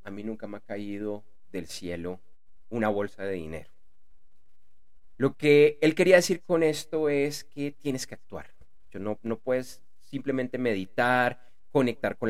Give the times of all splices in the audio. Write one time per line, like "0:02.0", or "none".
none